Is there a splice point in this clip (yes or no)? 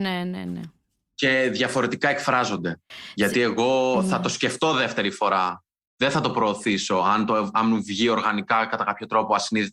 no